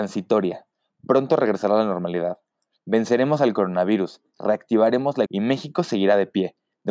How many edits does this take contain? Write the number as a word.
one